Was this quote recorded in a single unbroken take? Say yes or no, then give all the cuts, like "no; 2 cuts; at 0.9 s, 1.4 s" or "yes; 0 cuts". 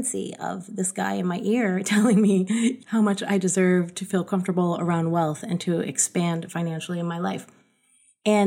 yes; 0 cuts